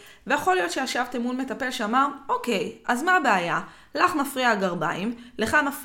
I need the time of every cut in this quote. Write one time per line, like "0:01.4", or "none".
none